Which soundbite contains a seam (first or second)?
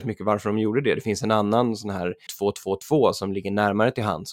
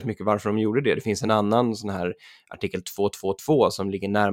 first